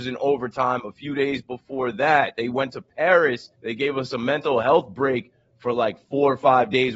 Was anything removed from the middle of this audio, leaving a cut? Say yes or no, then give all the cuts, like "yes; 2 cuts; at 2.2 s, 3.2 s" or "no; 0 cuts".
yes; 1 cut; at 3.5 s